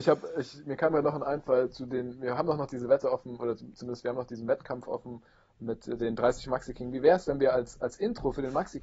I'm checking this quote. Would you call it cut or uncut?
uncut